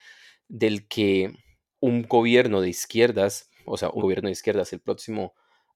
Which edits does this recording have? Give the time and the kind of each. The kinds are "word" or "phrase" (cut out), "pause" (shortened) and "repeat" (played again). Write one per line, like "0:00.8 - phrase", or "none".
0:04.0 - word